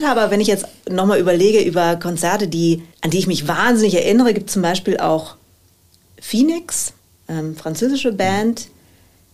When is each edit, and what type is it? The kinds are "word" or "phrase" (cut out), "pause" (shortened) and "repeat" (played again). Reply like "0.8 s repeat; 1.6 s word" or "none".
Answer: 2.9 s pause; 7.0 s pause